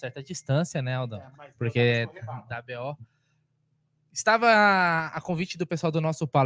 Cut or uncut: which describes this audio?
cut